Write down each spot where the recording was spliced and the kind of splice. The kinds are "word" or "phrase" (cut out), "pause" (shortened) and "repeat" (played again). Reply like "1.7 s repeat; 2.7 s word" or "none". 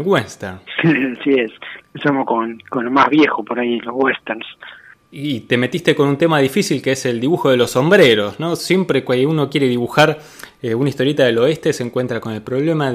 none